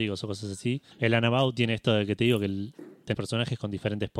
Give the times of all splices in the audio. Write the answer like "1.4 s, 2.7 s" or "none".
0.9 s, 3.1 s